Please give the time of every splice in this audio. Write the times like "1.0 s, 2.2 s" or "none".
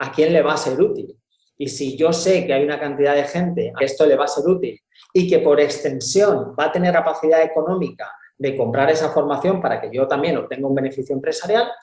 3.8 s, 6.9 s